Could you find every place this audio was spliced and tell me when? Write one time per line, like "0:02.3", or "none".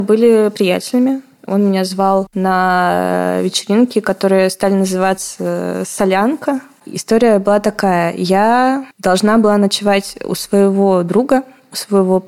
0:08.9